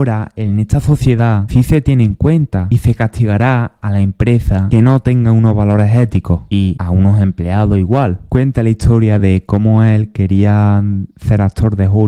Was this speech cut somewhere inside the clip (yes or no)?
no